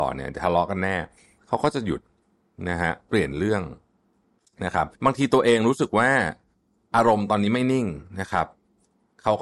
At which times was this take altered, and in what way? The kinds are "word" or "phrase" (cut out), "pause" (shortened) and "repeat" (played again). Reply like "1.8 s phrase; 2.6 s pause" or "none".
5.0 s pause